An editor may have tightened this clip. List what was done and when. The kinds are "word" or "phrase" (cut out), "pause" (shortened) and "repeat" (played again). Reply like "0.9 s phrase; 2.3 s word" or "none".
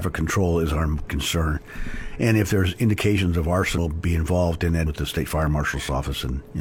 1.1 s word; 2.5 s word; 3.8 s word; 4.9 s word